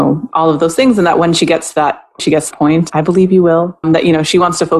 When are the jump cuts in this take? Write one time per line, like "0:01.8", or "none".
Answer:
0:02.2
0:02.5
0:02.9
0:03.8